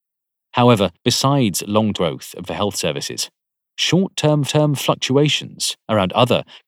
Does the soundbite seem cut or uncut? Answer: cut